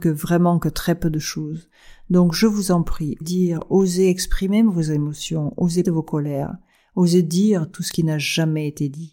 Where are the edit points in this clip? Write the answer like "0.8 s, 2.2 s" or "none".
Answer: 3.2 s, 5.8 s